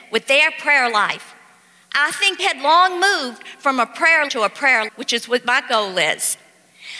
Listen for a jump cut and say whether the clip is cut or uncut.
cut